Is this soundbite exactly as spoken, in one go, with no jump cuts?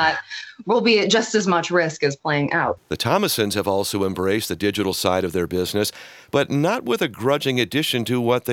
yes; 0 cuts

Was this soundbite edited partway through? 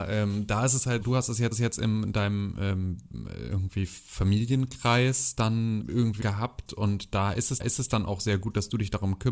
yes; 5 cuts; at 1.0 s, 1.5 s, 5.8 s, 6.2 s, 7.6 s

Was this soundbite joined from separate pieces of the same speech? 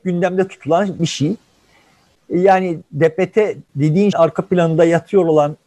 yes; 2 cuts; at 2.9 s, 4.1 s

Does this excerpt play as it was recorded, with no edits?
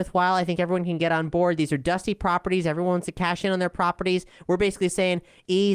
yes; 0 cuts

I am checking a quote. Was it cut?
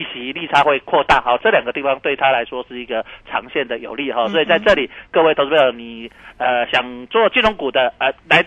no; 0 cuts

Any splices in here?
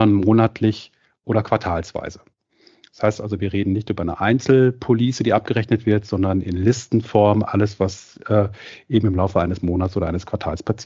no; 0 cuts

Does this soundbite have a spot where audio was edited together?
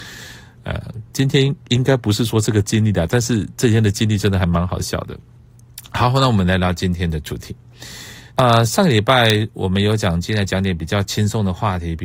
yes; 2 cuts; at 1.1 s, 8.3 s

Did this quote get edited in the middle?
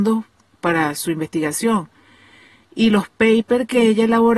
no; 0 cuts

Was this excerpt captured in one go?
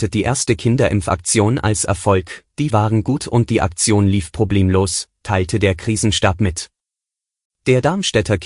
no; 2 cuts; at 2.7 s, 3.2 s

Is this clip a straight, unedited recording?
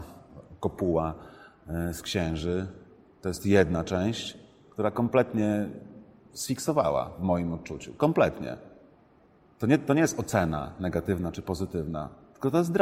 yes; 0 cuts

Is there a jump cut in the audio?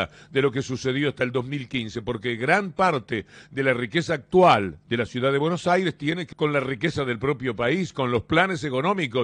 yes; 1 cut; at 6.3 s

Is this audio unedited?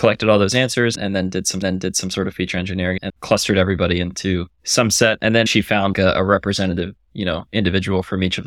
no; 5 cuts; at 1.6 s, 3.1 s, 4.5 s, 5.5 s, 5.9 s

